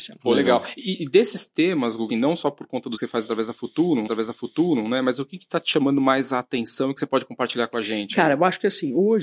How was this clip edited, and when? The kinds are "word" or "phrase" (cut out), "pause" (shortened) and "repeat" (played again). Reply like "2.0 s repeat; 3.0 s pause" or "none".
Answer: 2.1 s word; 3.0 s word; 4.1 s repeat

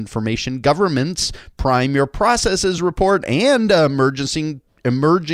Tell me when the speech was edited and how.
none

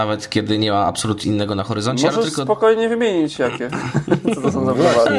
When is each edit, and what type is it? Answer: 1.2 s word

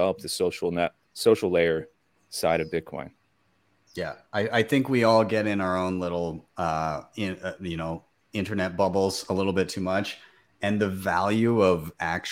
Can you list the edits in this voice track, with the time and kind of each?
none

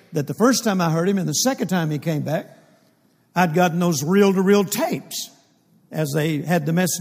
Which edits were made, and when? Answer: none

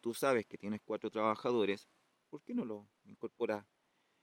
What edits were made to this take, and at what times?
none

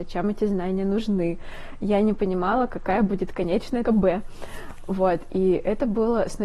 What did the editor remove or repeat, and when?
3.8 s word

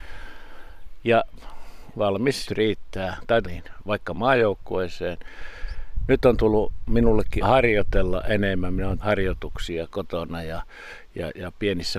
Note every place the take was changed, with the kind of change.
1.9 s word; 2.5 s phrase; 3.4 s word; 7.4 s word; 9.0 s phrase

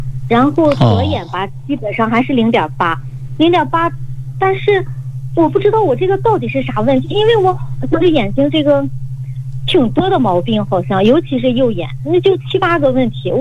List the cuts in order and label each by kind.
none

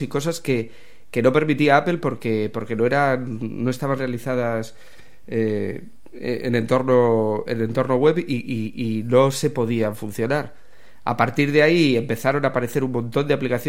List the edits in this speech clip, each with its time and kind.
none

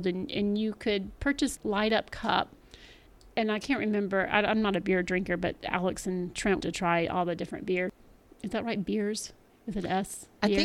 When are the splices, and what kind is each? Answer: 1.6 s word; 6.6 s word

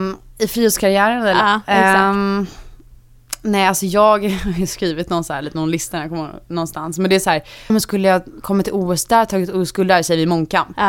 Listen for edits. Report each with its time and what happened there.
7.7 s word

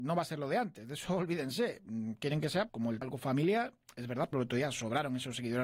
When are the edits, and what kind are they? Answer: 2.7 s word; 3.0 s word; 4.3 s word

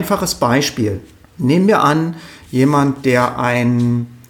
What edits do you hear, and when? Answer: 1.2 s pause

